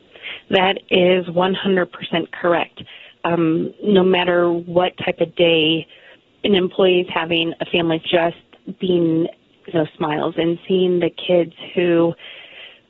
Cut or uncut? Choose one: cut